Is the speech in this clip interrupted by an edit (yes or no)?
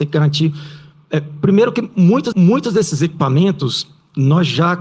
yes